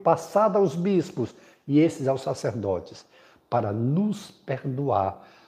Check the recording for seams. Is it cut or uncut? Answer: uncut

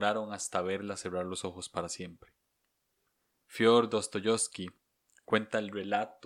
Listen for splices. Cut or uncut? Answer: uncut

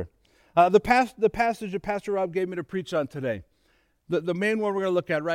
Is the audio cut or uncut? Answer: uncut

